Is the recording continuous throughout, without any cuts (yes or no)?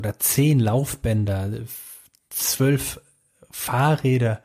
yes